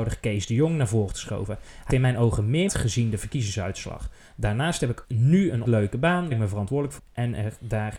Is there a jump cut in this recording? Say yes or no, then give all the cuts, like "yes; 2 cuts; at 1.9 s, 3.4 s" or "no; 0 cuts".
yes; 7 cuts; at 1.1 s, 1.9 s, 2.7 s, 5.0 s, 5.6 s, 6.3 s, 7.0 s